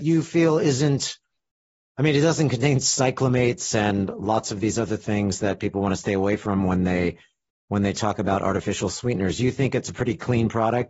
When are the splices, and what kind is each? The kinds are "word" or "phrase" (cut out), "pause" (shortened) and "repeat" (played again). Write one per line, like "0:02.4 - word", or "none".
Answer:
none

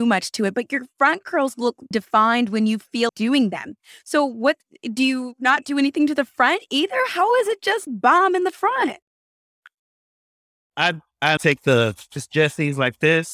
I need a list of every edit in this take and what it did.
0:01.9 - word
0:03.1 - word
0:07.9 - word
0:11.4 - word

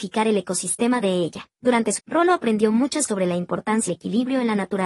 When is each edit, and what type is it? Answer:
0:01.0 - word
0:01.5 - pause
0:02.0 - word
0:03.1 - word
0:03.9 - word

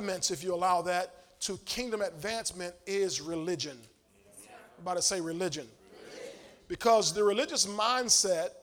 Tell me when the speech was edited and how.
none

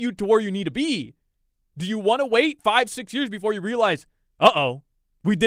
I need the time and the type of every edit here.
none

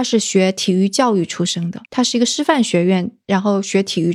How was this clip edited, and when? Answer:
0:01.9 - pause

